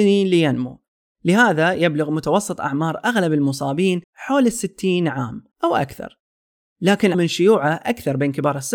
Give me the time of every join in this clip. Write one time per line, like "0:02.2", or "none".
0:04.0
0:05.5
0:07.1